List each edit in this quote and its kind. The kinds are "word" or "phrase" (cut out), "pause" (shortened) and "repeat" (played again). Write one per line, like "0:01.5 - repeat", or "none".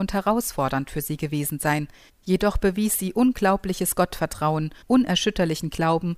0:02.1 - pause
0:04.8 - pause